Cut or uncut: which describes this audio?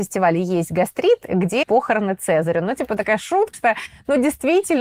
cut